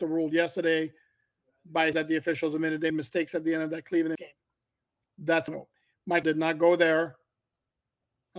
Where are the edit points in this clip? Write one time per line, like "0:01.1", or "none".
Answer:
0:01.9
0:02.9
0:04.2
0:05.5
0:06.2